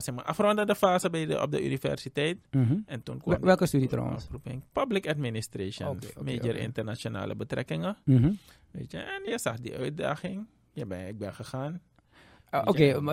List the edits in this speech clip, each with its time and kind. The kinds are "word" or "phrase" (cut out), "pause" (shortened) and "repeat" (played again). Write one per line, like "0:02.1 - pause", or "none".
0:03.0 - word
0:09.3 - word